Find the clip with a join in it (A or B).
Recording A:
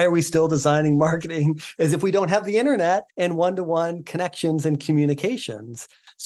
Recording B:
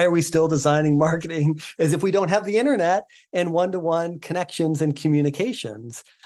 A